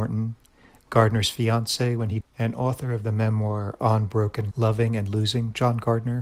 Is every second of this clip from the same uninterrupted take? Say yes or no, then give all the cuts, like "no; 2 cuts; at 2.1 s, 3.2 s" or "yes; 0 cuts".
no; 2 cuts; at 2.2 s, 4.5 s